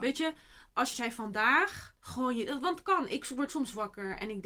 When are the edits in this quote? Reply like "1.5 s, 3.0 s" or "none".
0.9 s, 2.0 s, 3.5 s